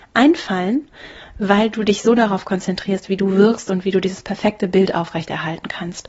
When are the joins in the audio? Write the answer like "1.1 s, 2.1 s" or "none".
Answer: none